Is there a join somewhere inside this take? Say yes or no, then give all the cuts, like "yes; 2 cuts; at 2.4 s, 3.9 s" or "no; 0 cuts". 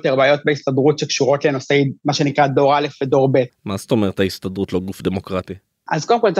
yes; 1 cut; at 3.5 s